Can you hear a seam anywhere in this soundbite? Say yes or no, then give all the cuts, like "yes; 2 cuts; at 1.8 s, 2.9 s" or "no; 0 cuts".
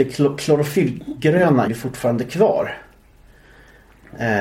yes; 1 cut; at 1.7 s